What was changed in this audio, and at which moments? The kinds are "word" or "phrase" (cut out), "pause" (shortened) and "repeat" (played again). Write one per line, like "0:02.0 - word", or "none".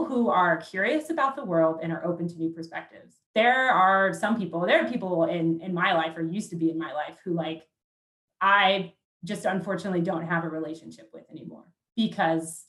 0:03.2 - pause
0:09.0 - pause